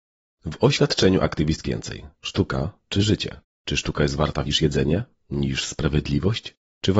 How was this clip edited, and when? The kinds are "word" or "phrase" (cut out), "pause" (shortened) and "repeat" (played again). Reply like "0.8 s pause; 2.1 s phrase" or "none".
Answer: 1.6 s phrase; 4.5 s word